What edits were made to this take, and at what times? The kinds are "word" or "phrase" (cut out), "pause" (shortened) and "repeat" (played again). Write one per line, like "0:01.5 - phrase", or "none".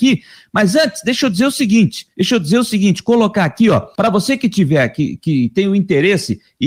0:02.1 - pause
0:03.9 - pause

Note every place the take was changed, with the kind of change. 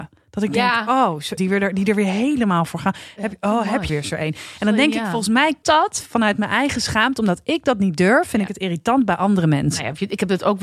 0:01.4 - word
0:03.9 - word
0:05.6 - word

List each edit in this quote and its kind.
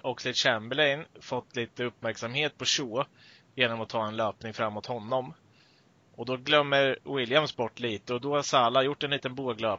none

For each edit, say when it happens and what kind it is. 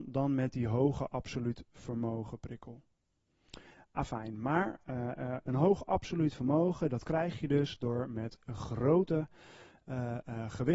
none

